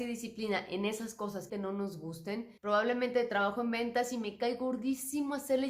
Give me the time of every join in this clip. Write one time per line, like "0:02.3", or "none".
0:01.5
0:02.6